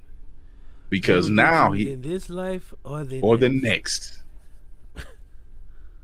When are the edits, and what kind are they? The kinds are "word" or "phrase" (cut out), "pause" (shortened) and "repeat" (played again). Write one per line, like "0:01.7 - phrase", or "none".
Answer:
none

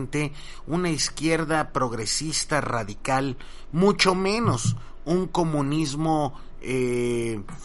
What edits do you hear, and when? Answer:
none

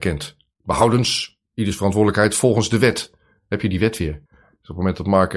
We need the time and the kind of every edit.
0:01.5 - pause
0:04.3 - pause

